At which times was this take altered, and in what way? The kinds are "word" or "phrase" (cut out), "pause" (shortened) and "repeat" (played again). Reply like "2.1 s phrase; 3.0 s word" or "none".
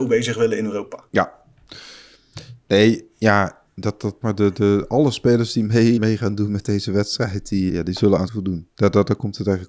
1.1 s pause; 3.7 s pause; 4.2 s phrase; 6.0 s word; 7.7 s word; 8.3 s phrase